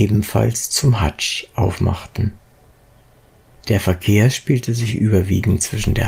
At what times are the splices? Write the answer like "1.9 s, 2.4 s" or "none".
none